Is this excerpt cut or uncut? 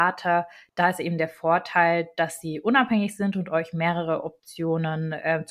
uncut